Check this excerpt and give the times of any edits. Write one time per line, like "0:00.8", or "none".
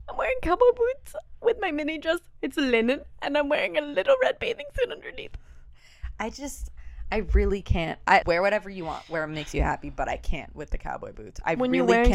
0:02.4
0:08.2